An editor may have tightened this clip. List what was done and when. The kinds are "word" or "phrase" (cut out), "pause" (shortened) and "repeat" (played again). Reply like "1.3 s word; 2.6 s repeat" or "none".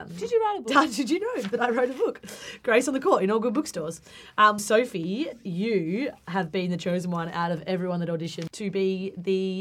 4.6 s word